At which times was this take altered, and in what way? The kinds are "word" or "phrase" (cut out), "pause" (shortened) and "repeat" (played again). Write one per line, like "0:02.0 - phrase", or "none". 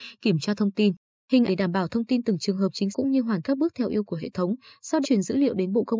0:01.5 - word
0:02.9 - word
0:03.4 - word
0:04.0 - word
0:05.0 - word